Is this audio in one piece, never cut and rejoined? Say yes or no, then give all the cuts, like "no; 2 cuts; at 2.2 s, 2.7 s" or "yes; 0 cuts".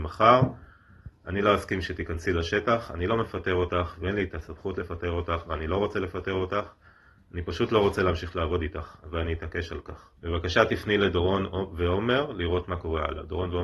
no; 1 cut; at 10.2 s